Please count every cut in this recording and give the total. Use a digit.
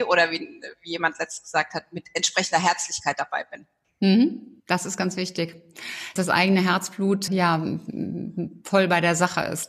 4